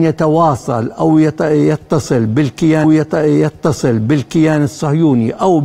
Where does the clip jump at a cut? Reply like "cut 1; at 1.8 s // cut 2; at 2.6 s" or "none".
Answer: cut 1; at 2.8 s